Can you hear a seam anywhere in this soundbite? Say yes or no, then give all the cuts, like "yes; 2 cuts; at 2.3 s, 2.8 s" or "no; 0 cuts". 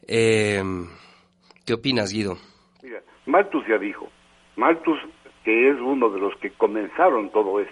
no; 0 cuts